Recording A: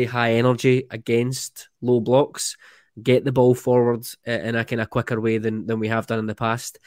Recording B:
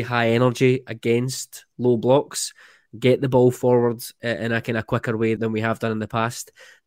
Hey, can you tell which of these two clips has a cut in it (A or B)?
B